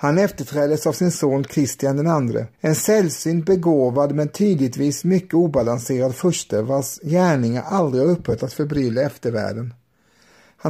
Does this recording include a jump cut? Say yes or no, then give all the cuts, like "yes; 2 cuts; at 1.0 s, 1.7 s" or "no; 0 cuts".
yes; 1 cut; at 2.5 s